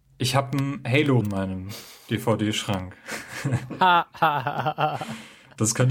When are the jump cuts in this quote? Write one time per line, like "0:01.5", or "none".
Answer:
0:01.2